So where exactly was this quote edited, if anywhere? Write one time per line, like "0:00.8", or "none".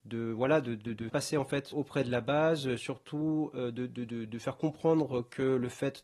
0:01.1
0:01.7